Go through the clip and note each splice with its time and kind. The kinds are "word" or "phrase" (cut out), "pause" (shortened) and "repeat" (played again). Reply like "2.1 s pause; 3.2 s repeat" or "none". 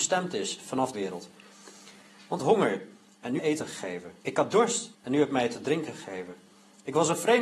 0.9 s phrase; 2.4 s phrase; 3.4 s phrase; 4.2 s pause; 4.9 s pause